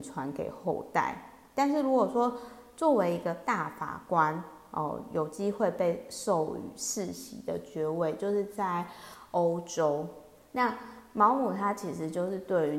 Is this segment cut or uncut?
uncut